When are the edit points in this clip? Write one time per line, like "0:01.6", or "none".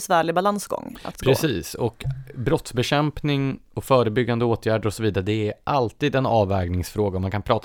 0:03.7